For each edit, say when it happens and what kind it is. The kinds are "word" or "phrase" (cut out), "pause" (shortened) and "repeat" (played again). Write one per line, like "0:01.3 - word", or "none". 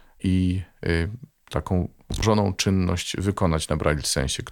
none

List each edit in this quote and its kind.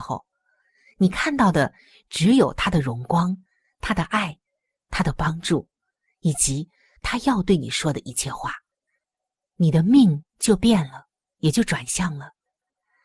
none

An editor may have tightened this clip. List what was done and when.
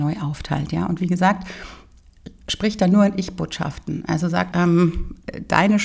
0:04.5 - word

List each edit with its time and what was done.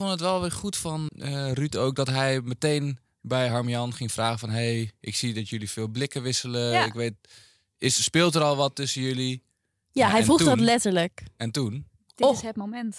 0:01.1 - word

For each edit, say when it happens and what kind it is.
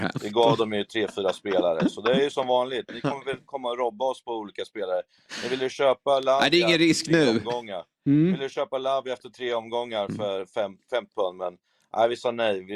0:08.0 - pause
0:11.1 - word

